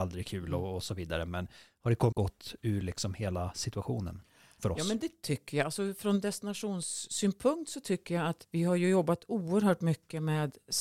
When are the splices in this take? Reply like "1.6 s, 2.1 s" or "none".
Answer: 2.1 s

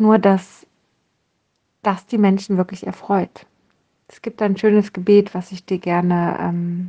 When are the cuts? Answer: none

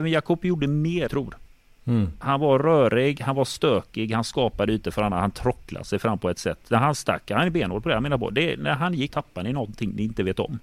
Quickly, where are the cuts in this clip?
1.1 s, 9.1 s

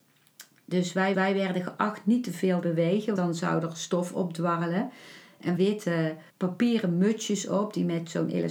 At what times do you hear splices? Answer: 1.1 s, 2.6 s, 3.2 s, 5.6 s, 6.3 s

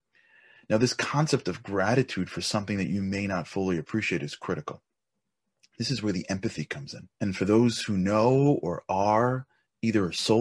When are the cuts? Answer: 7.1 s

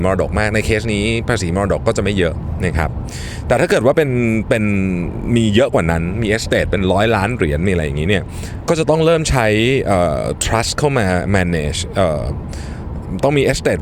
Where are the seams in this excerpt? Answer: none

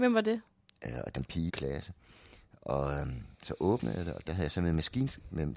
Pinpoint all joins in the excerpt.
1.2 s, 1.5 s, 4.3 s

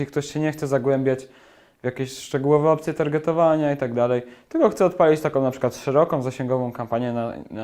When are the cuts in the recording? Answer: none

